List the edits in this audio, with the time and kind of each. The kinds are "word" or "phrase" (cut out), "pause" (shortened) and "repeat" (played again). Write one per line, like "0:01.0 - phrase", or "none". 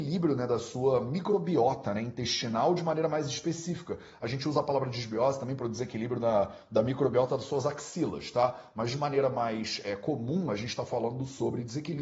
none